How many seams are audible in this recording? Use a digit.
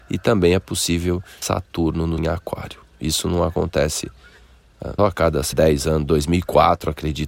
4